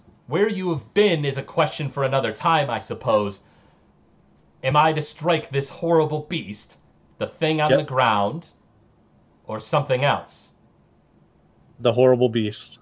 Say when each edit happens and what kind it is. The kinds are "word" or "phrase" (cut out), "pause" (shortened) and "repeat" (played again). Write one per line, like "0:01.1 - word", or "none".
none